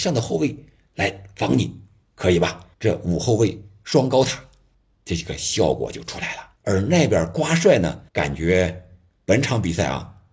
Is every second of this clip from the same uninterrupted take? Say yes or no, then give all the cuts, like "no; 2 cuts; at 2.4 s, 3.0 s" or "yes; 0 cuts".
no; 4 cuts; at 2.7 s, 4.7 s, 6.6 s, 8.1 s